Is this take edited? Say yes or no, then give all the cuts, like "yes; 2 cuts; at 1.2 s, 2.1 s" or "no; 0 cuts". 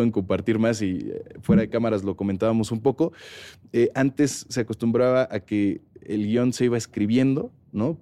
no; 0 cuts